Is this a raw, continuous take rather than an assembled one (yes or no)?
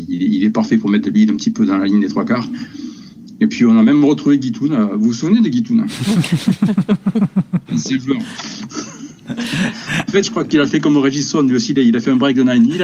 yes